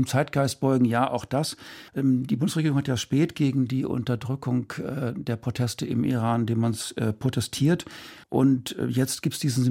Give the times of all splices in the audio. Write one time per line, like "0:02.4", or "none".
0:01.9
0:08.2